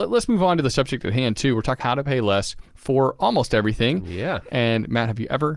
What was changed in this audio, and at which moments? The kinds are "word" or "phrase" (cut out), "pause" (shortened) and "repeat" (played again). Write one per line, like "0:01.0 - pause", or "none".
0:01.8 - word
0:02.6 - pause